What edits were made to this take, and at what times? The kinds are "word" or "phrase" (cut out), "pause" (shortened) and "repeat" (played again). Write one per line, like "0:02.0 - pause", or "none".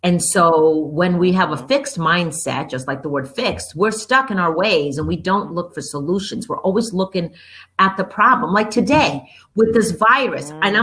none